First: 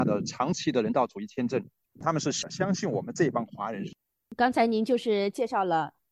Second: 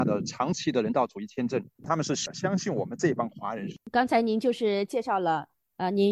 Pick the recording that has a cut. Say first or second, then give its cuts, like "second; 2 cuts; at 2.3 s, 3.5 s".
second; 2 cuts; at 1.7 s, 3.8 s